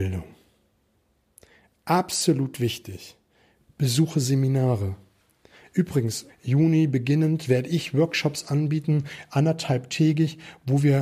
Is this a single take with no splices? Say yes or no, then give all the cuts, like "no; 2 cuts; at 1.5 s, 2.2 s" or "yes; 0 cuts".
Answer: no; 1 cut; at 6.3 s